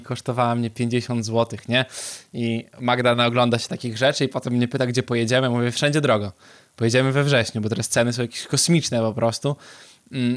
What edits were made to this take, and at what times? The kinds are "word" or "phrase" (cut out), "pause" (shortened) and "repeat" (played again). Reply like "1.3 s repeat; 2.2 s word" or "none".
none

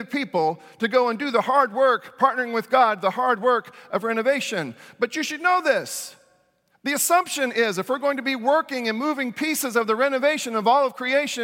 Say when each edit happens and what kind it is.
none

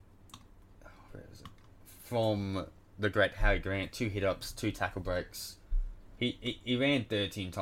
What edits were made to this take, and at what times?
1.1 s word

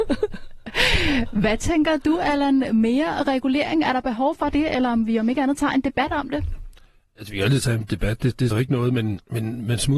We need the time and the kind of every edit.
8.5 s word

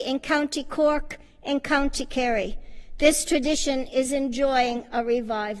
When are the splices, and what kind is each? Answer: none

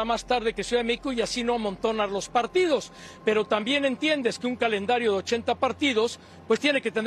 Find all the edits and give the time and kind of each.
none

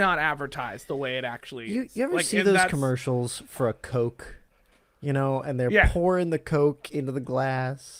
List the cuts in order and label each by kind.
none

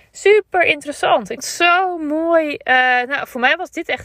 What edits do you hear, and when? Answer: 1.4 s word

